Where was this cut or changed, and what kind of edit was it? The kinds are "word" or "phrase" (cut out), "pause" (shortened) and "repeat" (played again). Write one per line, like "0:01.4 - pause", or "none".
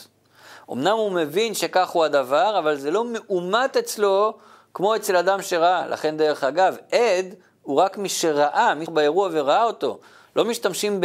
0:08.9 - word